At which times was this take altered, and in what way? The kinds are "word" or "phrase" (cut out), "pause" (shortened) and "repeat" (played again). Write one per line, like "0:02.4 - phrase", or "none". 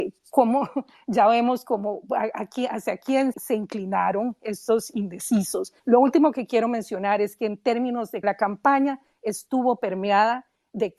0:03.3 - word
0:05.8 - pause
0:08.2 - word